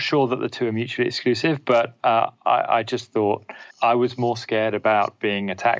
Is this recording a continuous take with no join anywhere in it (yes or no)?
no